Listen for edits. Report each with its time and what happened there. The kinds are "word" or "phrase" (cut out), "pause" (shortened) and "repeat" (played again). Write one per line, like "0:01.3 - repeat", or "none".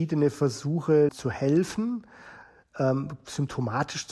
0:01.1 - phrase